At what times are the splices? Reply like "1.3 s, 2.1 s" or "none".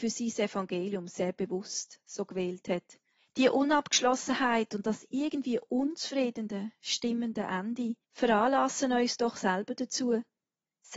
3.2 s, 8.0 s